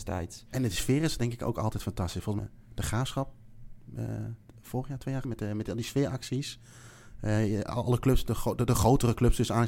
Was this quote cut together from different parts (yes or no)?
yes